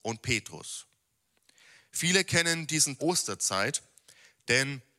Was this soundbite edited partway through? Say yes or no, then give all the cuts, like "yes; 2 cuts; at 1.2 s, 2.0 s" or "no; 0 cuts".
yes; 1 cut; at 3.0 s